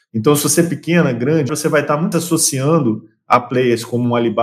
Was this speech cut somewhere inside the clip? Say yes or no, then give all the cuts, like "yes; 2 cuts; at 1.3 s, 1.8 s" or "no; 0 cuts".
yes; 2 cuts; at 1.5 s, 2.1 s